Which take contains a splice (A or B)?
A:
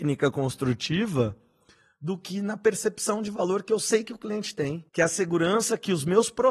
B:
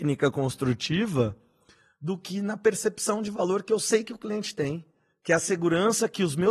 A